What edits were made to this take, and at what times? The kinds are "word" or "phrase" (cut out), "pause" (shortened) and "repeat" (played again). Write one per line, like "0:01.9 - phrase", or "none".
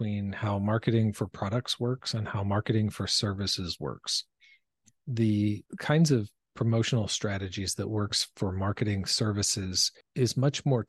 none